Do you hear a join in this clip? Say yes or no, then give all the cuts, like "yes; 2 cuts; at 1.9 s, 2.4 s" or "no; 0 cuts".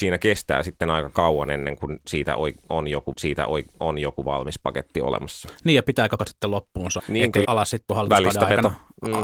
yes; 5 cuts; at 3.1 s, 6.2 s, 7.0 s, 7.4 s, 7.9 s